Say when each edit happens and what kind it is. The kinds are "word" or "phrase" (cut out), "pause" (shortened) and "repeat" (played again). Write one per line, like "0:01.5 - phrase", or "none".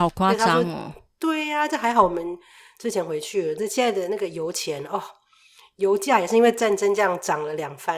none